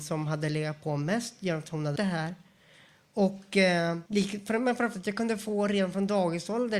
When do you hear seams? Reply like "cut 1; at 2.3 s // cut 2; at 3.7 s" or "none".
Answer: cut 1; at 2.0 s // cut 2; at 4.1 s // cut 3; at 4.9 s